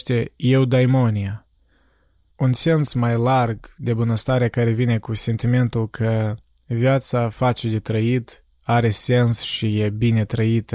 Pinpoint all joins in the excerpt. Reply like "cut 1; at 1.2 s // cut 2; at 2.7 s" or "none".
none